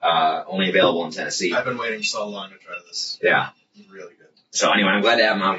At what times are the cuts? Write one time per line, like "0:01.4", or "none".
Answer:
none